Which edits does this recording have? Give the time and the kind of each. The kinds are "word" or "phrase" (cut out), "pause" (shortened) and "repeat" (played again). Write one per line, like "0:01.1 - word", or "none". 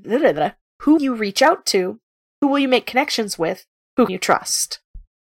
0:01.0 - word
0:04.1 - word